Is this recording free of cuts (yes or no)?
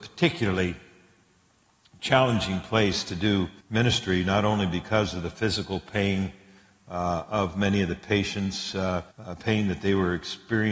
no